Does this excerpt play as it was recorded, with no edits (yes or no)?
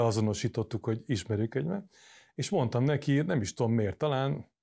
yes